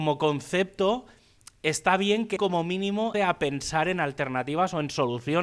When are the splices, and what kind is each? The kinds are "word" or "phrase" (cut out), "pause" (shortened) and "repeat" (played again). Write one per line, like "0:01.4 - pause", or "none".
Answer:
0:02.4 - word
0:03.1 - word